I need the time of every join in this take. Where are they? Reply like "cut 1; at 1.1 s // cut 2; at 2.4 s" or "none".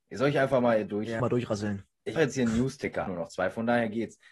cut 1; at 1.2 s // cut 2; at 2.2 s // cut 3; at 3.1 s